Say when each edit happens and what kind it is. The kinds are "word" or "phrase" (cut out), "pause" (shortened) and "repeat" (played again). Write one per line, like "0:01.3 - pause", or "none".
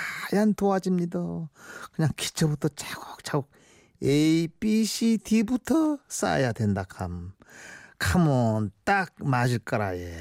none